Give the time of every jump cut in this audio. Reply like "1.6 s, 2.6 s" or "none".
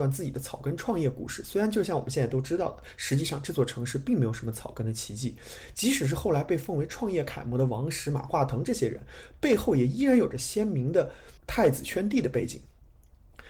11.4 s